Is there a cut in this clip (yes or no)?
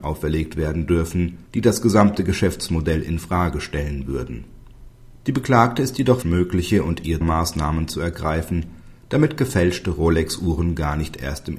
yes